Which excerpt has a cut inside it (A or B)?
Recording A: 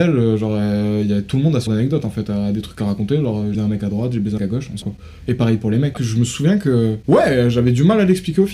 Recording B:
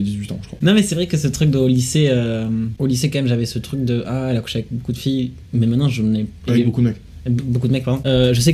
A